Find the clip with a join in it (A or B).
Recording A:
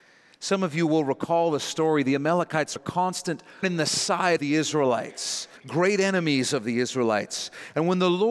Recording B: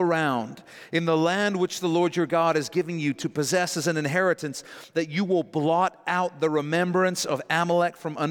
A